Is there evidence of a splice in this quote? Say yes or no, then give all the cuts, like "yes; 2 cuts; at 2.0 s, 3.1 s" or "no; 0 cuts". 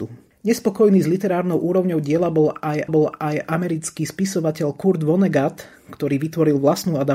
yes; 1 cut; at 2.9 s